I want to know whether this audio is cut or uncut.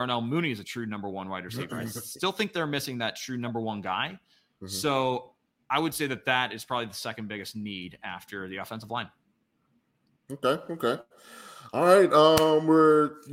uncut